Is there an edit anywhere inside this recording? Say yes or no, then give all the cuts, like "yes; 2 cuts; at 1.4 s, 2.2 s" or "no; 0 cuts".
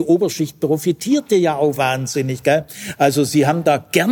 no; 0 cuts